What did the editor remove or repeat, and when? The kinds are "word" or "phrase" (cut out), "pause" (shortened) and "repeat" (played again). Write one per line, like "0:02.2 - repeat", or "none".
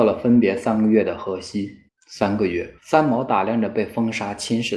0:01.9 - pause
0:02.8 - pause